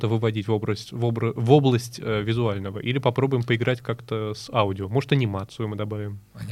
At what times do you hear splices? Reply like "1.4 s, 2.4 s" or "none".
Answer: none